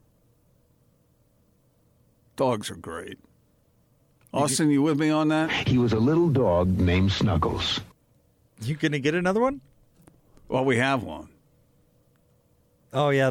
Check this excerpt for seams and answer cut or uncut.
uncut